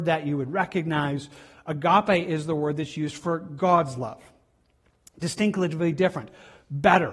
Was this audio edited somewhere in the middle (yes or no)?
no